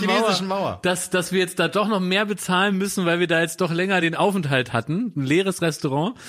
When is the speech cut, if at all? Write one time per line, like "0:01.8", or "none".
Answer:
none